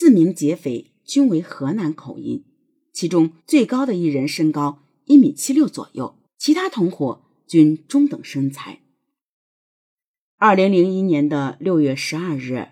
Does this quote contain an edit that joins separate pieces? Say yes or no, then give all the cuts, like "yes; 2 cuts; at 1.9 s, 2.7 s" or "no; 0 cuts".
yes; 2 cuts; at 3.4 s, 6.3 s